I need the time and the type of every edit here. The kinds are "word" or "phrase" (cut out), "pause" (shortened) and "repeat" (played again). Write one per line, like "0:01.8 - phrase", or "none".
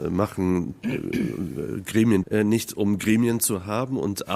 0:02.2 - word